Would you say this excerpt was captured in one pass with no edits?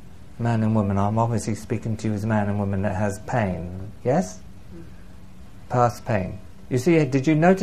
yes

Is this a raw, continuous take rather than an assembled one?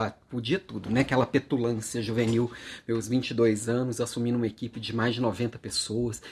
yes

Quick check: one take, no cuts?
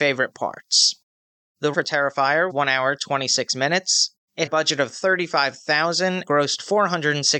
no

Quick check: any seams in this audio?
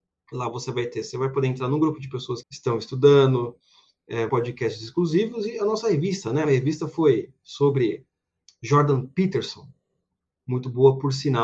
yes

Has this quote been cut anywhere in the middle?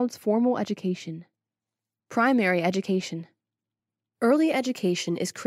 no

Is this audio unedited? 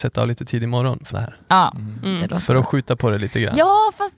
no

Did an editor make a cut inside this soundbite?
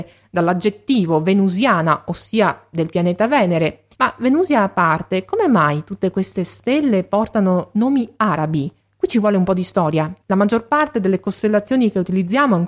yes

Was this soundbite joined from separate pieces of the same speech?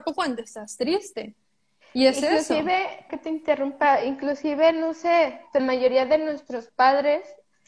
yes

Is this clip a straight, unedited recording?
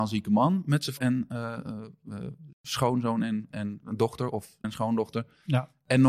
no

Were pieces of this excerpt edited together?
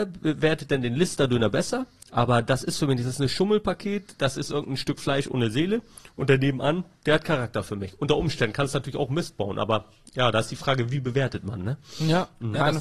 no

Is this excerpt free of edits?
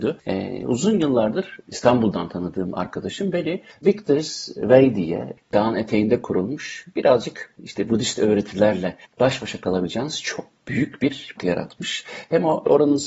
no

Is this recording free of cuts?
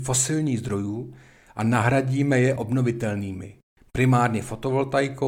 yes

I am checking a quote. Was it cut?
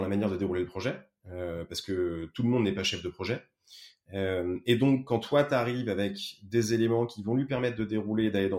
no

